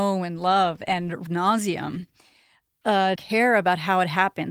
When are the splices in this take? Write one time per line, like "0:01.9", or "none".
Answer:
0:01.3
0:03.1